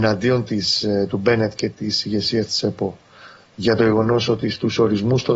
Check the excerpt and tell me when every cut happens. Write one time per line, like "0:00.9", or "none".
none